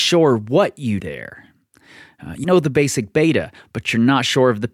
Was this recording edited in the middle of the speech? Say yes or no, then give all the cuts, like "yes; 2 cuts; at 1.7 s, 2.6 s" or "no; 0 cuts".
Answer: yes; 2 cuts; at 1.0 s, 2.4 s